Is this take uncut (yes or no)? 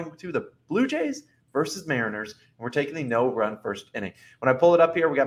yes